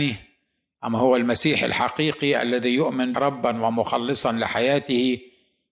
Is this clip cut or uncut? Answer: cut